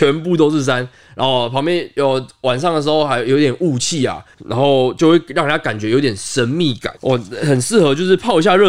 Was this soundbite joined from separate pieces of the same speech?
yes; 2 cuts; at 4.3 s, 7.0 s

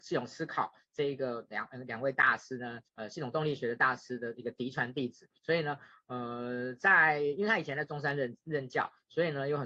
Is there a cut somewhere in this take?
yes; 2 cuts; at 2.9 s, 5.4 s

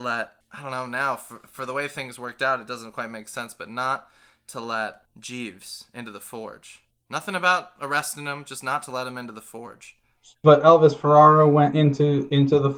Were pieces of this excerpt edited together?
no; 0 cuts

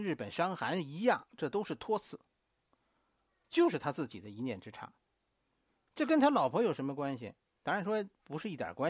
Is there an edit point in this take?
no; 0 cuts

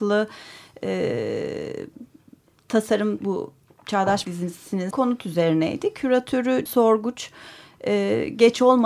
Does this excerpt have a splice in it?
yes; 4 cuts; at 3.2 s, 4.2 s, 4.9 s, 6.7 s

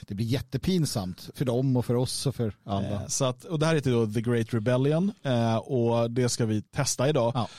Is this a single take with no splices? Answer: no; 1 cut; at 6.7 s

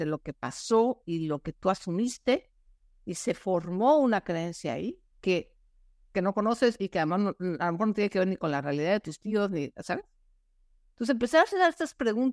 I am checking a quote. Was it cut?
no; 0 cuts

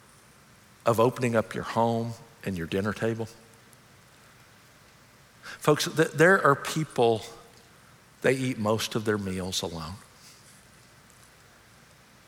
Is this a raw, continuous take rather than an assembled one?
yes; 0 cuts

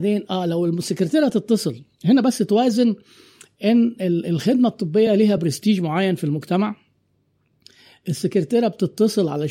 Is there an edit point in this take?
no; 0 cuts

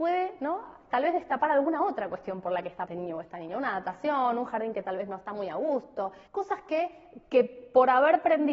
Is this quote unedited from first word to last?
no; 2 cuts; at 2.9 s, 6.3 s

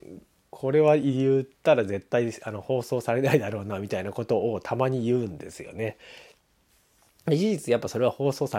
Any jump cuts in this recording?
no; 0 cuts

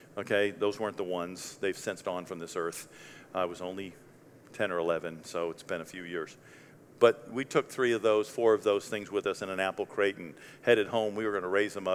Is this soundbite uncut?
no; 1 cut; at 2.0 s

